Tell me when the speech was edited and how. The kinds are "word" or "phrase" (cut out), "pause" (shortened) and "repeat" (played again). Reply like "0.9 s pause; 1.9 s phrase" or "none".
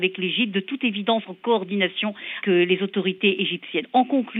2.4 s word